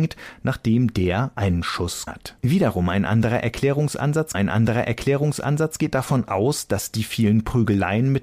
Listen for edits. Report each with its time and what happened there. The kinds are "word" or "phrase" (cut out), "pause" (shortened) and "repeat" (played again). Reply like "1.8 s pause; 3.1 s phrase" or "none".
2.1 s word; 2.4 s pause; 4.3 s repeat